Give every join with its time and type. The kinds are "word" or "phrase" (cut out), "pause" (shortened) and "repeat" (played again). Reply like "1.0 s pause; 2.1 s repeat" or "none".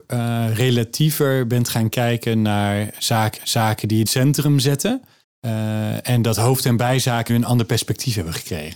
3.4 s repeat; 4.1 s phrase; 5.2 s pause; 7.3 s word